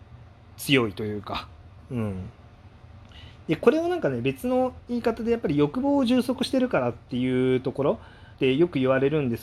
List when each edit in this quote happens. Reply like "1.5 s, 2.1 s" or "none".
8.3 s